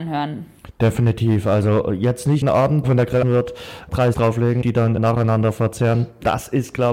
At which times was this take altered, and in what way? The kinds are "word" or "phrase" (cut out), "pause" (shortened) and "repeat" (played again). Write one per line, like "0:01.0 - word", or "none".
0:02.4 - word
0:02.8 - word
0:03.2 - word
0:04.1 - word
0:04.6 - word
0:05.0 - word